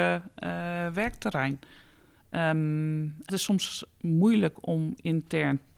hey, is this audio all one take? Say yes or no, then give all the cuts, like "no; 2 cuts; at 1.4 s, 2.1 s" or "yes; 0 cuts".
no; 1 cut; at 3.3 s